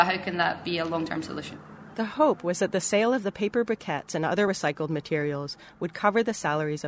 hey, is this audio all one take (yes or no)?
yes